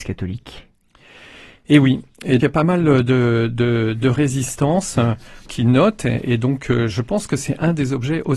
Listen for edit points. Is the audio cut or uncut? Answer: cut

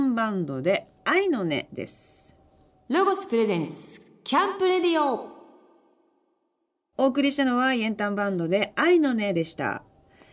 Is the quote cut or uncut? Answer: uncut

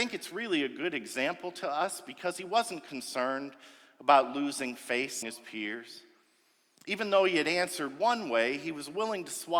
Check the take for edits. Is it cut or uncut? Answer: cut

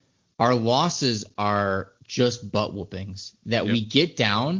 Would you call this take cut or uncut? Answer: cut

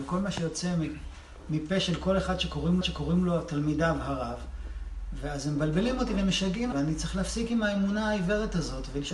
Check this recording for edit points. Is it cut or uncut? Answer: cut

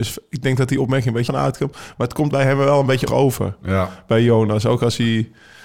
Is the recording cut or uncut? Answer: cut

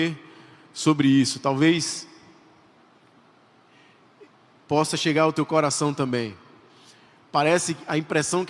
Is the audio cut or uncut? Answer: uncut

